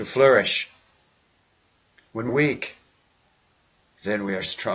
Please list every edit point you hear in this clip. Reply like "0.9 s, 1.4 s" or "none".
2.3 s